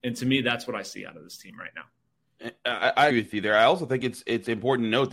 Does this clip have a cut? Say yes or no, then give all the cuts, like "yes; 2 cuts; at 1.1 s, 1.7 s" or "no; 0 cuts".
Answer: yes; 1 cut; at 3.1 s